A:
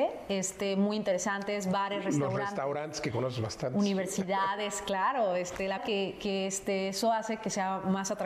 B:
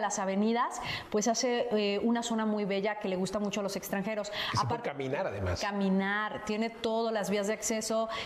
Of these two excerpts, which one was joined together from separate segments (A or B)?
A